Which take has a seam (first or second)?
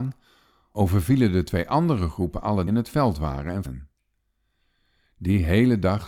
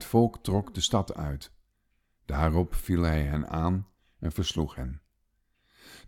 first